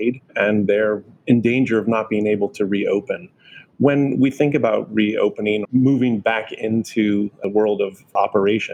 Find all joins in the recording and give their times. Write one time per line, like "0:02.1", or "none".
0:05.6